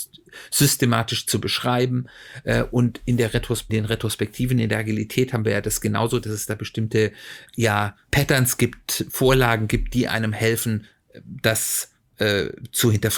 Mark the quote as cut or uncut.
cut